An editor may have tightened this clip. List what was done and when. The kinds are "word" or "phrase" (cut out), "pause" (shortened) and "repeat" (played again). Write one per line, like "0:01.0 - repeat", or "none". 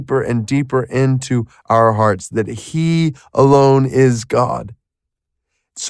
none